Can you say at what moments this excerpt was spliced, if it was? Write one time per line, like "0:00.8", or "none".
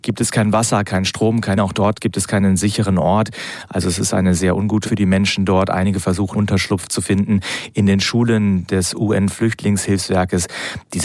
0:01.6
0:04.8
0:06.3